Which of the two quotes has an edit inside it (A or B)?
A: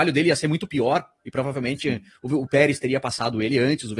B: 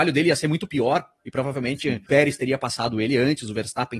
B